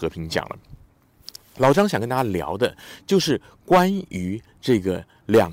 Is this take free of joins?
yes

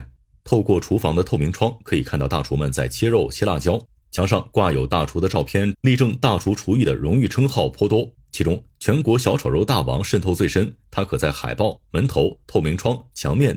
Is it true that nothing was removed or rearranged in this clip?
no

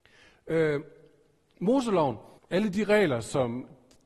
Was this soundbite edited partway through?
yes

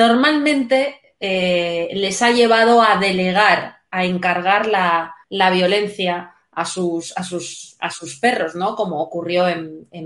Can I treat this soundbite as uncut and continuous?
no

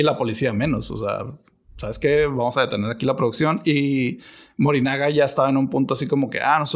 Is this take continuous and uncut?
yes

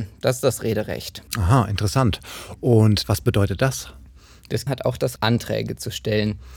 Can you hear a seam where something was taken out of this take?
yes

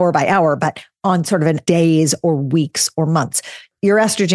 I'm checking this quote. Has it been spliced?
yes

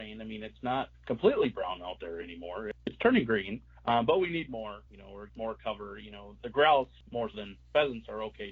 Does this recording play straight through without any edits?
no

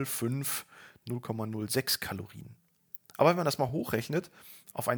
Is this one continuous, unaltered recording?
yes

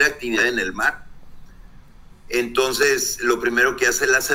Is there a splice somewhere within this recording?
no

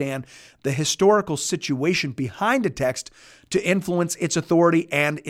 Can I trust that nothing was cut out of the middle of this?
yes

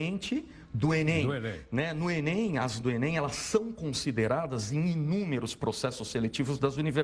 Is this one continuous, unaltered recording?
no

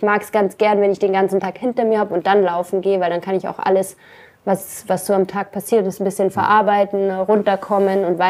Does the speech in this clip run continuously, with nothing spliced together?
yes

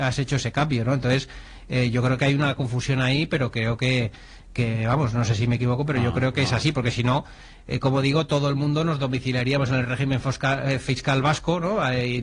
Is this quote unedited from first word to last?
yes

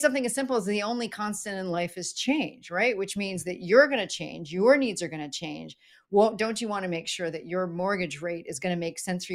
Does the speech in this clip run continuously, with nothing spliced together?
yes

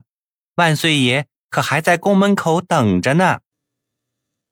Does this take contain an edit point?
no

